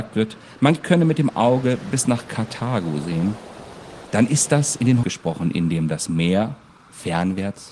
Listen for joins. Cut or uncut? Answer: cut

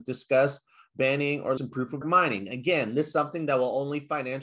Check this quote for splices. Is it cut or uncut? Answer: cut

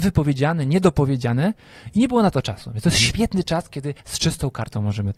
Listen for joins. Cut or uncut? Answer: cut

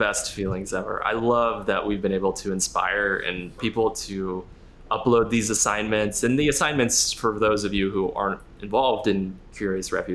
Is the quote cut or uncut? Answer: cut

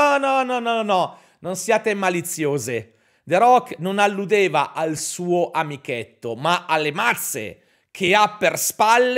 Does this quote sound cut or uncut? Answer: uncut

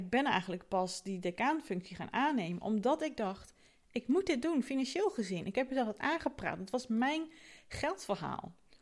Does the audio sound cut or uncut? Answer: uncut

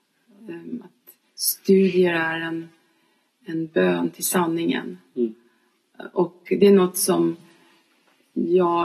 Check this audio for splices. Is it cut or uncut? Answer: uncut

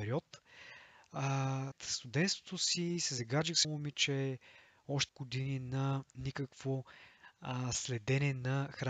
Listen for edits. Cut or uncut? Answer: cut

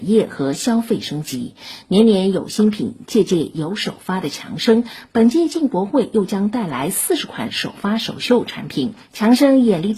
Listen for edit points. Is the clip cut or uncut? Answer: cut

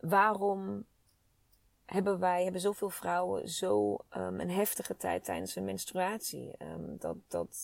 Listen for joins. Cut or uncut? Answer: uncut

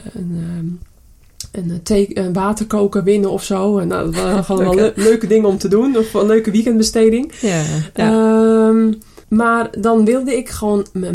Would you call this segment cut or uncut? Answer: cut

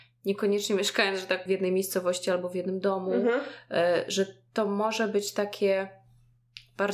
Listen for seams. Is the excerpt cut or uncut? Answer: cut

